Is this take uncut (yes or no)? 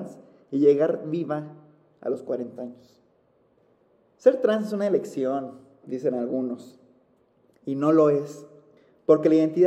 yes